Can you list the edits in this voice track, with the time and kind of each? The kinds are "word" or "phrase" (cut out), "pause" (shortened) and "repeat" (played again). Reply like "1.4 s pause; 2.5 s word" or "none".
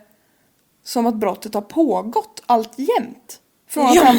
none